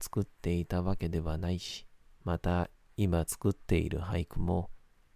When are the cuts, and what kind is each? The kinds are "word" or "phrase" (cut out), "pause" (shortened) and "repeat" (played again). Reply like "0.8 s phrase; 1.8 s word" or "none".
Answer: 2.0 s pause